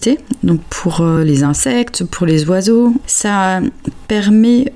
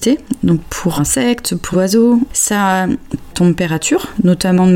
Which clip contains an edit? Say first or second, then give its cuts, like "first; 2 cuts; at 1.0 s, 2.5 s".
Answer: second; 3 cuts; at 1.0 s, 1.7 s, 3.3 s